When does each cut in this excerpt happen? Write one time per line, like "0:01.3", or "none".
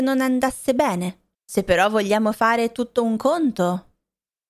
0:01.3